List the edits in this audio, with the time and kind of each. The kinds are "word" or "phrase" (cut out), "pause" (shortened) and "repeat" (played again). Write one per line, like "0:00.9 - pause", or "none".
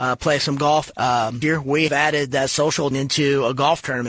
0:00.9 - word
0:01.4 - word
0:01.9 - word
0:02.9 - word